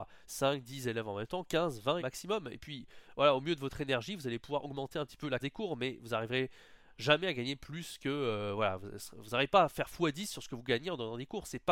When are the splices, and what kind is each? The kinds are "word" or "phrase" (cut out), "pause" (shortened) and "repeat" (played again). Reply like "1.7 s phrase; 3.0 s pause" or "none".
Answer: 2.0 s word; 5.4 s word